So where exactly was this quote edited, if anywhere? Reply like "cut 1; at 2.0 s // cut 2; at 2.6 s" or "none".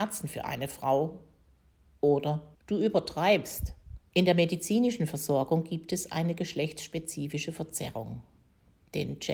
cut 1; at 2.5 s // cut 2; at 4.1 s

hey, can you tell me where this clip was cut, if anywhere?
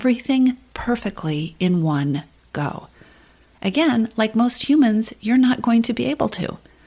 none

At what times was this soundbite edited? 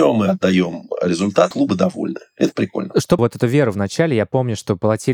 cut 1; at 1.5 s // cut 2; at 3.2 s

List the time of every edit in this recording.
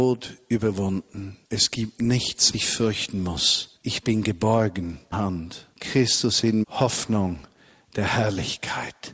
cut 1; at 1.4 s // cut 2; at 2.5 s // cut 3; at 3.8 s // cut 4; at 5.1 s // cut 5; at 5.7 s // cut 6; at 6.6 s

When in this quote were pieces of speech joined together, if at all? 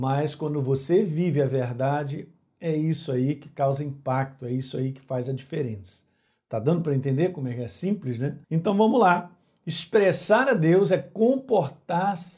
cut 1; at 8.4 s

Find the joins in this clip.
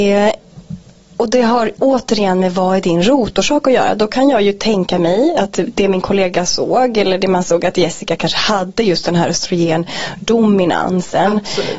none

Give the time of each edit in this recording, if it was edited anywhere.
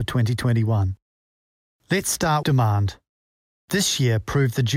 cut 1; at 2.4 s

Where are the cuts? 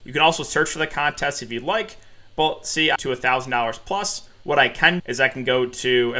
cut 1; at 3.0 s // cut 2; at 5.0 s

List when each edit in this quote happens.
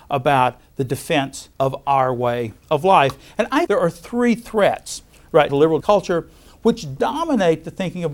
cut 1; at 1.5 s // cut 2; at 2.6 s // cut 3; at 3.7 s // cut 4; at 5.5 s // cut 5; at 5.8 s

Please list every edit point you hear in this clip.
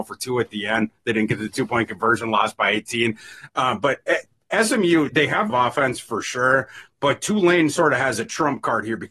cut 1; at 5.1 s // cut 2; at 5.5 s

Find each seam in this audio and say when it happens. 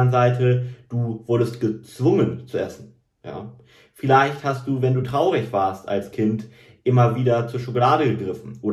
none

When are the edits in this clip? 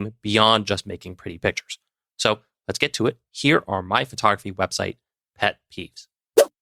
none

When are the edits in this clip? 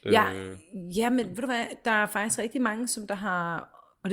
none

